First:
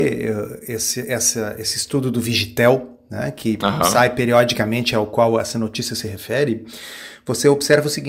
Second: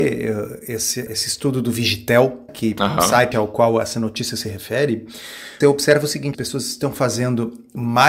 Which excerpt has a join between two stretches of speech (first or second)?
second